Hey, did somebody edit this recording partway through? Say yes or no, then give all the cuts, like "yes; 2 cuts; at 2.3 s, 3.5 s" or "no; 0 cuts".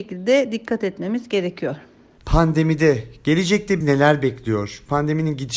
yes; 1 cut; at 3.8 s